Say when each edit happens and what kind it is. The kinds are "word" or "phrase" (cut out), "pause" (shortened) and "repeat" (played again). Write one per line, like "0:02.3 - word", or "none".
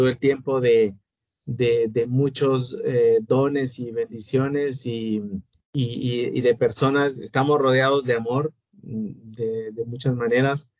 0:05.5 - pause

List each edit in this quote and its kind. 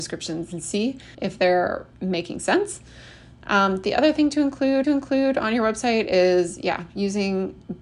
0:01.1 - pause
0:04.8 - repeat

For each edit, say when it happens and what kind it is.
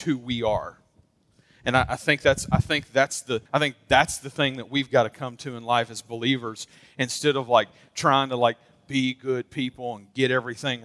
0:03.5 - pause

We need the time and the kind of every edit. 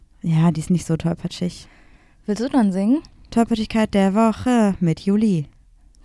none

